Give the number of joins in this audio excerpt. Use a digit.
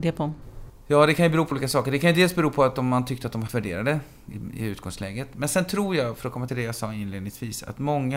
3